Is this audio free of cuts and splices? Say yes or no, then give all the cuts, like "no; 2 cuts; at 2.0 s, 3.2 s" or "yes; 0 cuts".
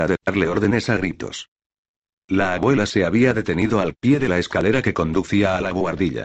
yes; 0 cuts